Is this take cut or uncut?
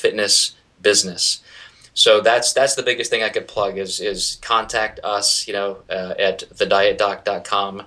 uncut